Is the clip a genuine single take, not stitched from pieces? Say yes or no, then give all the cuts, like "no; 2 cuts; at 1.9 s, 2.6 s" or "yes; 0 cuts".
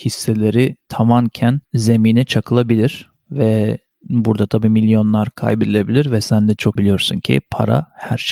no; 2 cuts; at 1.6 s, 6.8 s